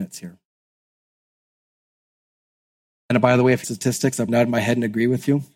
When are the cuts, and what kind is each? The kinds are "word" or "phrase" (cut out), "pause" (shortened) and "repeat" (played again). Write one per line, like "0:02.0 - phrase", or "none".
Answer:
0:03.6 - phrase
0:04.3 - word